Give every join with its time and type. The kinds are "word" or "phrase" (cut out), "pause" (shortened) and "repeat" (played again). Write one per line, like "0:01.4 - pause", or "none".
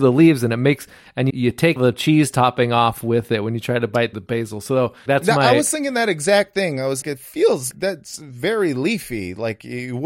0:01.3 - word
0:01.8 - word
0:04.1 - word
0:05.1 - word
0:07.0 - word
0:07.7 - word